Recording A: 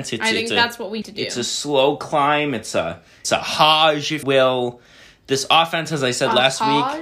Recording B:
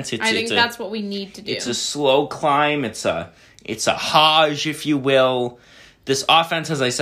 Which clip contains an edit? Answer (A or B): A